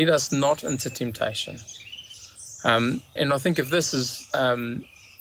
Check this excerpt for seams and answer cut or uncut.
cut